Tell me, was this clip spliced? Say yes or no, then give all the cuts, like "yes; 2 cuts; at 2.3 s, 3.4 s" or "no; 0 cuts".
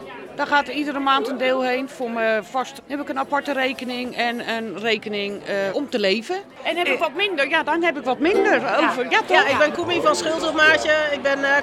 yes; 2 cuts; at 2.8 s, 5.7 s